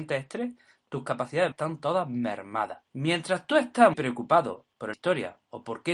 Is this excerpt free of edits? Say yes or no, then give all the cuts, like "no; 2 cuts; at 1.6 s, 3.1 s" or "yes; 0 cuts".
no; 4 cuts; at 1.5 s, 2.9 s, 3.9 s, 4.9 s